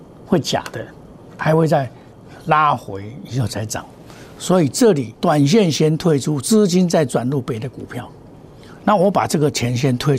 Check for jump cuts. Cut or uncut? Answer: cut